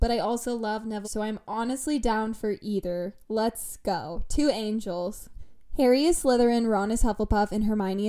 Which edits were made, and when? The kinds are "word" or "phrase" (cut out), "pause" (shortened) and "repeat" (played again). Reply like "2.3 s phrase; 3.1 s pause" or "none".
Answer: 1.0 s phrase